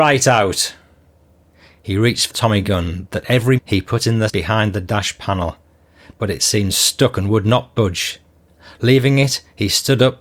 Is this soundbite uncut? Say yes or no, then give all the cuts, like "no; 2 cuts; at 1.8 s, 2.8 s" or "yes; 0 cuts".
no; 3 cuts; at 2.3 s, 3.6 s, 4.3 s